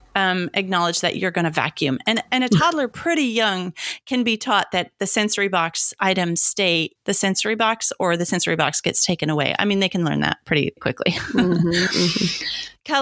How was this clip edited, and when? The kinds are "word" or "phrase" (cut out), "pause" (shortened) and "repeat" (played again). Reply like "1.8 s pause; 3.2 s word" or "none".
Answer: 7.0 s word; 10.8 s word

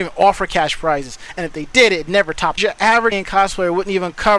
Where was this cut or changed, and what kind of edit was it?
2.6 s phrase; 3.1 s word

